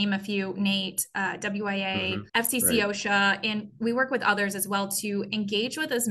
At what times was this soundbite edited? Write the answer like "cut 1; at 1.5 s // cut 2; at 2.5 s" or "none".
cut 1; at 2.3 s